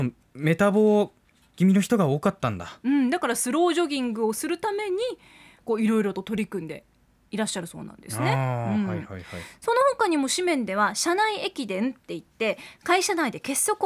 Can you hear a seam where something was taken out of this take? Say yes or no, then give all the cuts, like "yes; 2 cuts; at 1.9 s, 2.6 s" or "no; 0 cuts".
no; 0 cuts